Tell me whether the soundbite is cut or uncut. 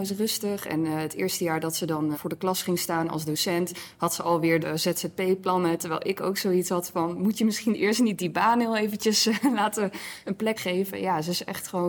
cut